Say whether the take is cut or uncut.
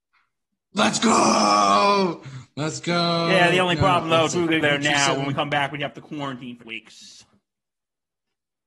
cut